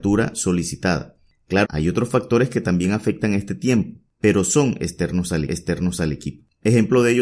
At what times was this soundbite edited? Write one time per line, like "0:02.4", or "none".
0:01.6
0:05.5